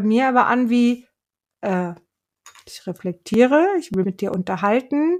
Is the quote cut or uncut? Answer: cut